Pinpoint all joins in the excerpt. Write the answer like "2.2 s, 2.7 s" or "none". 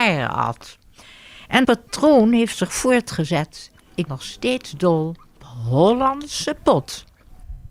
1.6 s, 4.1 s, 5.4 s